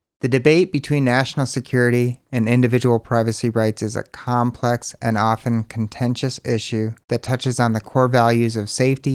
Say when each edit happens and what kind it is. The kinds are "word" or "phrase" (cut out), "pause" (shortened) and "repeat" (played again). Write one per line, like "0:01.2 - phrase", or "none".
0:07.0 - pause